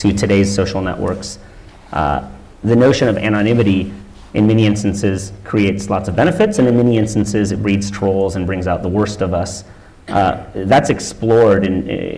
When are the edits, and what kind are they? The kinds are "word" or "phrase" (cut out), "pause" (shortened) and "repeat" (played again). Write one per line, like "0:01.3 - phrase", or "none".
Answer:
none